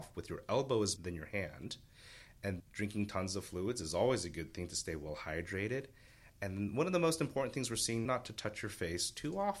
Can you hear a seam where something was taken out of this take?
yes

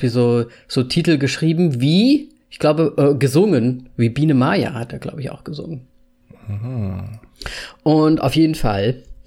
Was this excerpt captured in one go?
yes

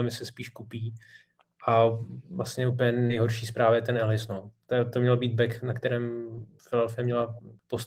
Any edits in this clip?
no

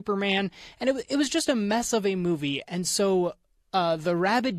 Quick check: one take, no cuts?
yes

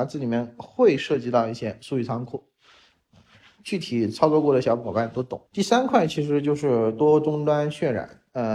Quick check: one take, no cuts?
no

